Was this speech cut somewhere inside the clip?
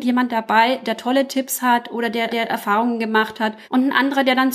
yes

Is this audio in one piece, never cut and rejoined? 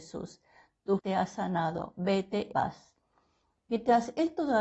no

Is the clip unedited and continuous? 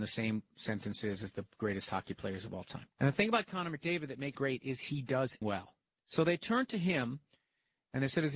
no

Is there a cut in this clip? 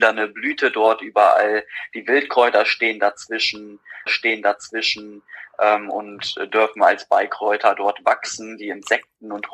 yes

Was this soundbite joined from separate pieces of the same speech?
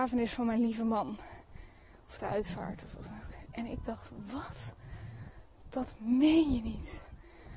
no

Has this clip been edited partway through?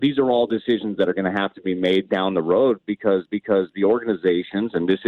yes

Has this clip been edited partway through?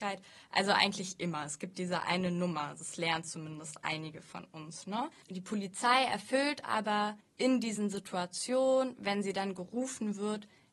no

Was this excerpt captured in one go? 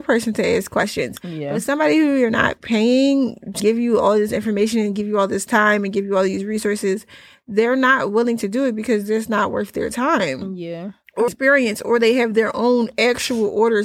no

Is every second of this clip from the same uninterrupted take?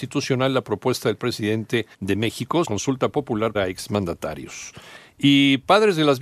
no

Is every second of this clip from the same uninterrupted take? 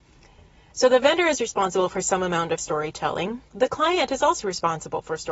no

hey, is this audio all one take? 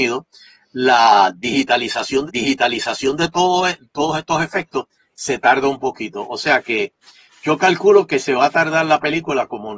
no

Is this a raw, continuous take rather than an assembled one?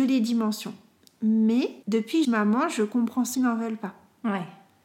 no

